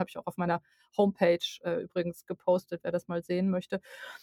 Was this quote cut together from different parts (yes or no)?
no